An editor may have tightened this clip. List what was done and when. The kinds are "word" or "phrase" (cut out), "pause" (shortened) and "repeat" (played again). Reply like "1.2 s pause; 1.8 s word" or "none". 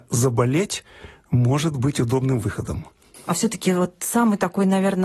none